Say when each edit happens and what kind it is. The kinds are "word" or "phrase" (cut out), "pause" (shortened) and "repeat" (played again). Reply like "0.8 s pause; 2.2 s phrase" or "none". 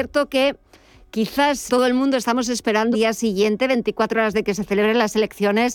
1.7 s word; 2.9 s word; 4.3 s word